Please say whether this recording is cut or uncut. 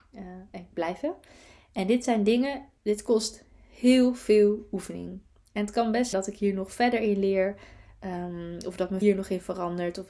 cut